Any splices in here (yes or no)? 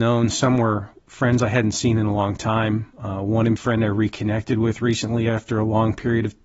yes